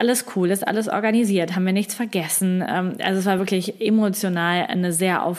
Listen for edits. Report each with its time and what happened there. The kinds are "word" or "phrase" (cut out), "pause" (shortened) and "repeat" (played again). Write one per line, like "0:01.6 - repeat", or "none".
none